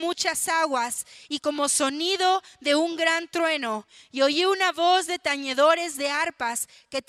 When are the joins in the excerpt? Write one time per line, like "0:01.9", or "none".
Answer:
none